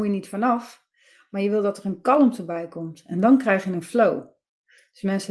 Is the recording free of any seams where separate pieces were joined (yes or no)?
yes